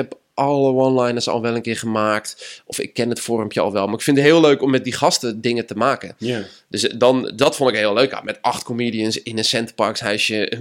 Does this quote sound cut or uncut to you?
uncut